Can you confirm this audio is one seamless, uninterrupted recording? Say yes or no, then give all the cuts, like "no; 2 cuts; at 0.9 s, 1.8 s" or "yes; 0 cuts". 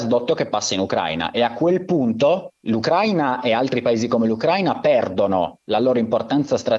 no; 1 cut; at 2.6 s